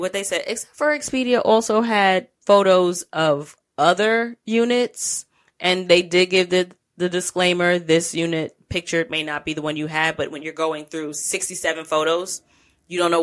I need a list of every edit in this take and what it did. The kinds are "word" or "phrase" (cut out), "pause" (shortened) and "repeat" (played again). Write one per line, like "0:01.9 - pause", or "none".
0:02.4 - pause